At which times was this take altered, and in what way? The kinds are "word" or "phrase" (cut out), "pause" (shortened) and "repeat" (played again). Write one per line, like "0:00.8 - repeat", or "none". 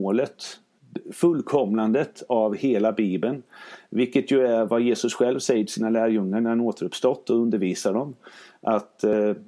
none